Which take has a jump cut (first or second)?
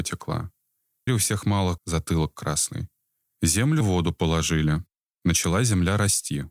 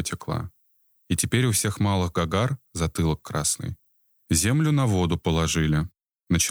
first